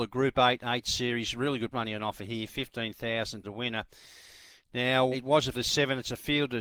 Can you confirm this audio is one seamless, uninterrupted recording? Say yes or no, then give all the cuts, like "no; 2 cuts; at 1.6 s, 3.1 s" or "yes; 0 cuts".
no; 4 cuts; at 1.7 s, 3.4 s, 5.1 s, 5.5 s